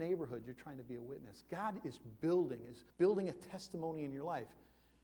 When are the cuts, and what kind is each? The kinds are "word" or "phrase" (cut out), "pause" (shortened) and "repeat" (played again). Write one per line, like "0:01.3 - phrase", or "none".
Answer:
0:02.9 - pause